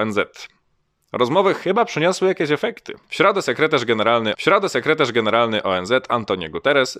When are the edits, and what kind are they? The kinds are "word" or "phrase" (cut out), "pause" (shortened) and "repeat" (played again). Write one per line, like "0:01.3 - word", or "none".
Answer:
0:03.0 - pause
0:04.3 - repeat